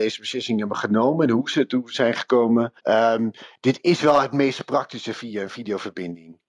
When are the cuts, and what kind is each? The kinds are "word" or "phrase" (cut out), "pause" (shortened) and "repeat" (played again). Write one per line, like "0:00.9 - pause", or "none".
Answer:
0:02.8 - pause